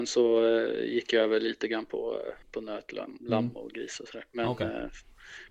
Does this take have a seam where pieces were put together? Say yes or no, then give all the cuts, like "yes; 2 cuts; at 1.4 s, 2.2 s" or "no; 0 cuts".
yes; 1 cut; at 2.4 s